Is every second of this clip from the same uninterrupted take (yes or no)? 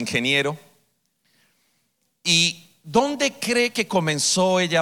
yes